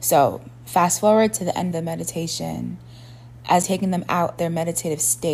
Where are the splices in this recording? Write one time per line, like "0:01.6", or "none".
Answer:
0:01.7
0:03.6
0:04.4